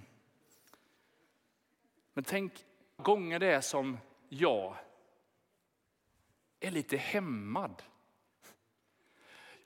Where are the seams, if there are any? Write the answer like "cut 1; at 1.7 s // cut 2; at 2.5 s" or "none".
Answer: cut 1; at 3.0 s